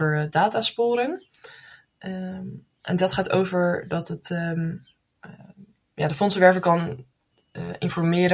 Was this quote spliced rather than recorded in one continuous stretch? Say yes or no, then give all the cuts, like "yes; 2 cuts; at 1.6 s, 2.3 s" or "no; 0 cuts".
no; 0 cuts